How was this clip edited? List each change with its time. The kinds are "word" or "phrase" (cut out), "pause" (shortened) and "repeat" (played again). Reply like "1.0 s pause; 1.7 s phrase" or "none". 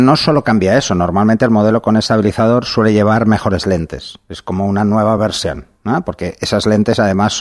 none